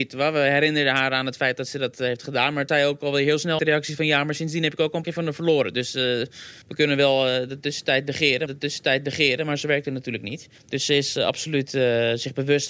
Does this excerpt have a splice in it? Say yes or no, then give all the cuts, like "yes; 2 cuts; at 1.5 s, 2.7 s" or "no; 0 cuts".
yes; 6 cuts; at 2.7 s, 3.6 s, 5.0 s, 6.6 s, 8.5 s, 10.6 s